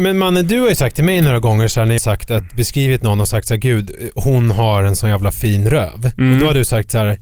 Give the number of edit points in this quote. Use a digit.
1